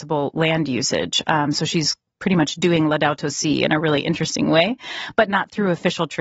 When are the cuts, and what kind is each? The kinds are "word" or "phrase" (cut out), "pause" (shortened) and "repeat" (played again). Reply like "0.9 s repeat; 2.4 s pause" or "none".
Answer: none